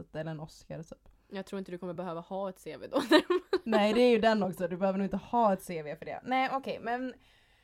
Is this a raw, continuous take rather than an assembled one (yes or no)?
yes